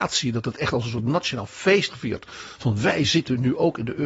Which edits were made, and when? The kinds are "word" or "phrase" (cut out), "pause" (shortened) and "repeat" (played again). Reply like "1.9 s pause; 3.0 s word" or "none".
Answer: 1.9 s word